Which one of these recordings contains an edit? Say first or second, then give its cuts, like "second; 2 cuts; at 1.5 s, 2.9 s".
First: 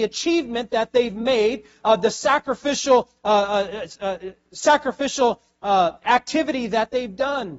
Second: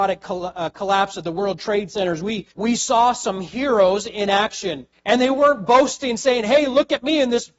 second; 2 cuts; at 2.5 s, 4.9 s